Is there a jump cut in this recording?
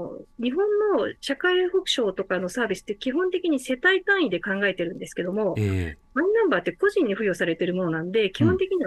yes; 1 cut; at 1.2 s

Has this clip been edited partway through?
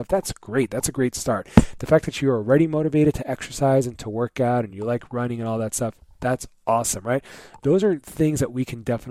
no; 0 cuts

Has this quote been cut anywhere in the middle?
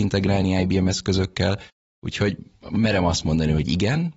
no; 0 cuts

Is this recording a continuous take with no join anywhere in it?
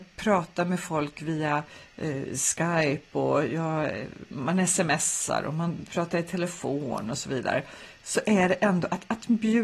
yes; 0 cuts

